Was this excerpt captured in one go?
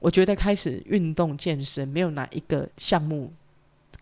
no; 1 cut; at 2.7 s

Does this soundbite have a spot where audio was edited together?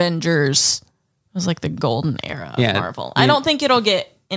no; 0 cuts

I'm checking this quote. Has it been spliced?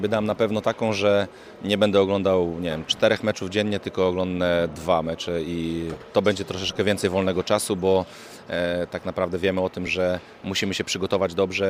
no; 0 cuts

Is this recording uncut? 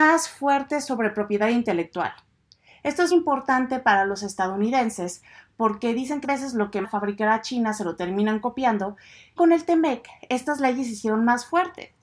no; 4 cuts; at 3.1 s, 6.2 s, 6.8 s, 9.4 s

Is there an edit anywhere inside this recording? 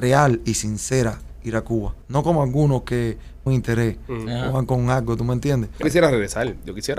yes; 3 cuts; at 2.0 s, 3.5 s, 5.8 s

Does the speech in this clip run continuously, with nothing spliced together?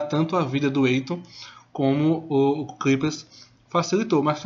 yes; 0 cuts

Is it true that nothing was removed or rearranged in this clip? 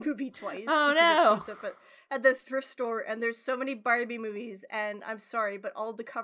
yes; 0 cuts

